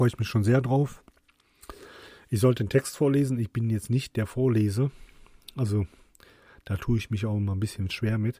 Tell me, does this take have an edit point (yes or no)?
no